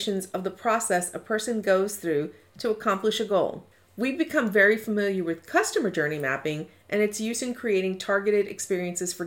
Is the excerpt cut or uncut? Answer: cut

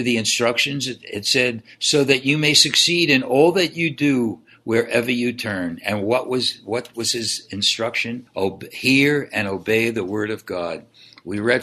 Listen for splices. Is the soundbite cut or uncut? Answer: cut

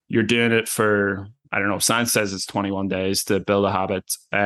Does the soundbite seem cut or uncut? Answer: uncut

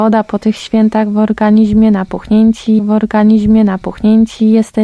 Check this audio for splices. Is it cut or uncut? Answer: cut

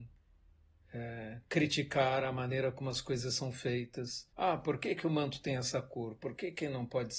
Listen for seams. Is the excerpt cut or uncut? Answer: cut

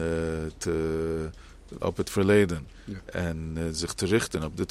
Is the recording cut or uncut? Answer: cut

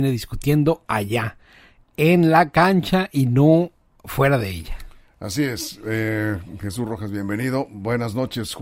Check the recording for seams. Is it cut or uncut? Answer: uncut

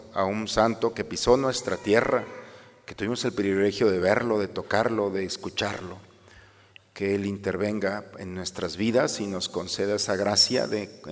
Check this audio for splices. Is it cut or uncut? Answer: uncut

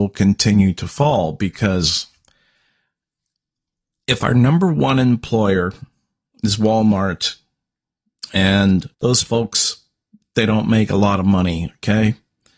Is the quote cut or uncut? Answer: cut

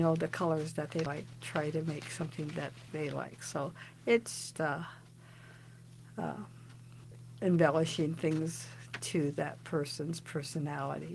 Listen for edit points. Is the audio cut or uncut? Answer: cut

